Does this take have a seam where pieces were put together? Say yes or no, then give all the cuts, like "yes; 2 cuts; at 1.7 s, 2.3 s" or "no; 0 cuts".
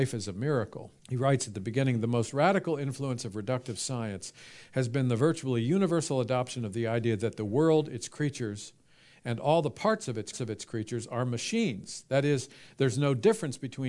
yes; 2 cuts; at 1.0 s, 10.3 s